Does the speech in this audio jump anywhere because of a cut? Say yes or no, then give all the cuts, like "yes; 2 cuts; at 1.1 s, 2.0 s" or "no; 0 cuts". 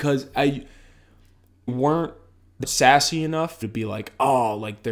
yes; 3 cuts; at 1.7 s, 2.6 s, 3.6 s